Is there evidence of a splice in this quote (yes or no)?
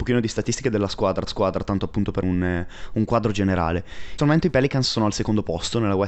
yes